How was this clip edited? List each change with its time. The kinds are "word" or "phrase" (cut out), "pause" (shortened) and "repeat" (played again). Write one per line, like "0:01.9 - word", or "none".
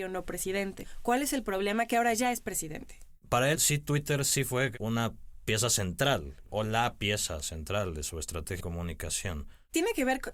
0:03.5 - word
0:06.5 - word
0:08.6 - word